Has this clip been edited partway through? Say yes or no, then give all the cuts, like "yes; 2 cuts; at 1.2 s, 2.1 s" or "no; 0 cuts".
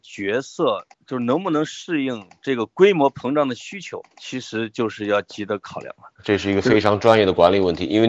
yes; 2 cuts; at 0.9 s, 4.1 s